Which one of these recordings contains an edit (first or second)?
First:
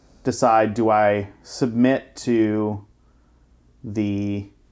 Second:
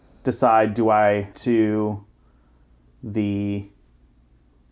second